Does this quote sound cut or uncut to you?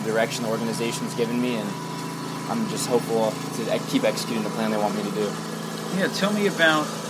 uncut